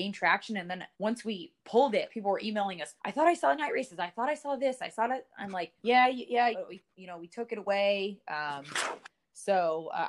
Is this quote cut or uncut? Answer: cut